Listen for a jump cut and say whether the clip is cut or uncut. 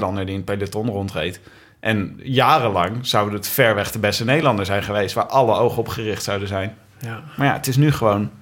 uncut